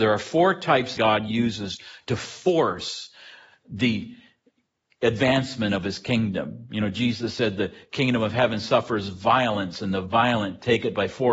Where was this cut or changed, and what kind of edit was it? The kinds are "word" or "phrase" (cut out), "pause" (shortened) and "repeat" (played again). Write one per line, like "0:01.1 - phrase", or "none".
0:01.0 - phrase